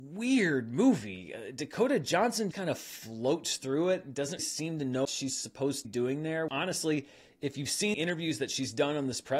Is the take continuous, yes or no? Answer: no